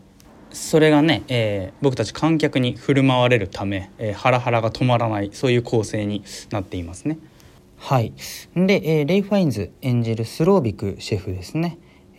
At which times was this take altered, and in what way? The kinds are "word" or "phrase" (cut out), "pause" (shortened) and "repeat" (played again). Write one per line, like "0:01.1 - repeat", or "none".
none